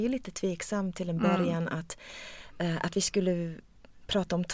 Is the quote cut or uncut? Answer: uncut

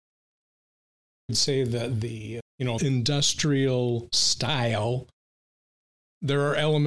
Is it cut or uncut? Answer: cut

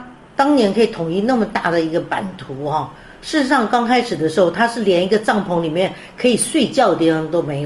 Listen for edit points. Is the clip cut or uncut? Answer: uncut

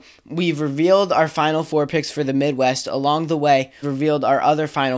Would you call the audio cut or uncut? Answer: cut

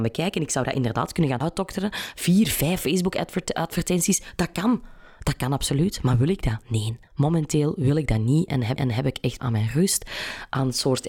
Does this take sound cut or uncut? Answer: cut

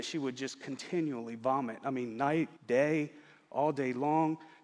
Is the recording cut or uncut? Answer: cut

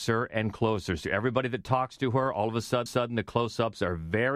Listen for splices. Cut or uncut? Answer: cut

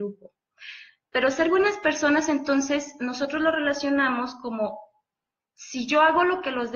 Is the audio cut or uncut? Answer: uncut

